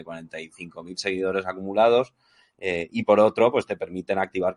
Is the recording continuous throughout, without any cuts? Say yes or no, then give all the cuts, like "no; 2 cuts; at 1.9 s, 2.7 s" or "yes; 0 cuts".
yes; 0 cuts